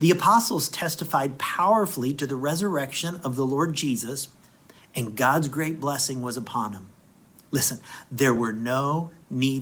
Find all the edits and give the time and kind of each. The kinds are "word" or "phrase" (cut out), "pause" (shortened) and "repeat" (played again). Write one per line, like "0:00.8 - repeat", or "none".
none